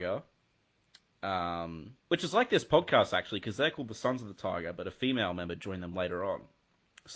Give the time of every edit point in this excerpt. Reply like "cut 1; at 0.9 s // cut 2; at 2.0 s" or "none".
cut 1; at 2.0 s